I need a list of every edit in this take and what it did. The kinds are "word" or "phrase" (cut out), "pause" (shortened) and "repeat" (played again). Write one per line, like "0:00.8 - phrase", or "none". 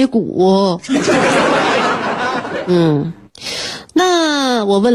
none